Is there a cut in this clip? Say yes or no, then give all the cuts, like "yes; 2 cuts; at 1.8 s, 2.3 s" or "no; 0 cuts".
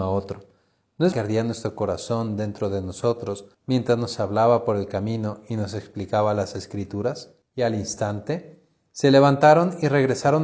yes; 3 cuts; at 1.1 s, 3.5 s, 7.4 s